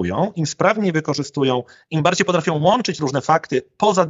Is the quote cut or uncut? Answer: uncut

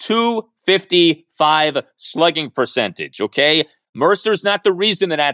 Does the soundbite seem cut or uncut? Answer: uncut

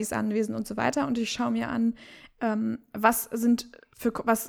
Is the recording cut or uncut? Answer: uncut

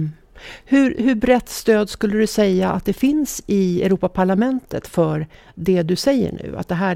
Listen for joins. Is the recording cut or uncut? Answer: uncut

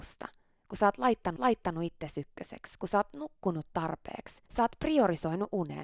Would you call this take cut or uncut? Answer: cut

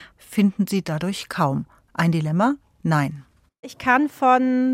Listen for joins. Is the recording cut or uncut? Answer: uncut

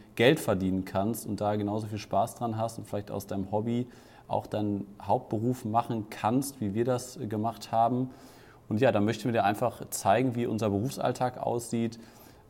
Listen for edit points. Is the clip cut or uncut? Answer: uncut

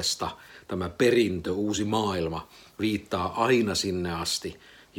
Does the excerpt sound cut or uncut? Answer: uncut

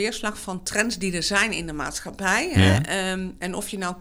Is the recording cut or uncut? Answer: uncut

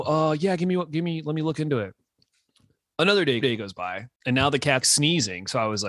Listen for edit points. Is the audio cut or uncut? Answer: cut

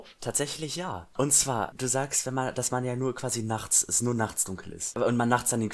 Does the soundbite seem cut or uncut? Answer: uncut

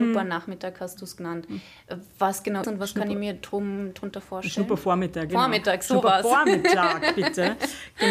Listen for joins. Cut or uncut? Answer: cut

